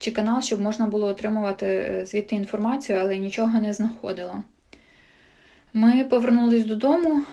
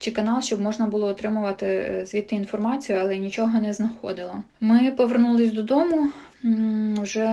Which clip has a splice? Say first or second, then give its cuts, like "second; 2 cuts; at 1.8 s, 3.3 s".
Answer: second; 2 cuts; at 4.5 s, 6.3 s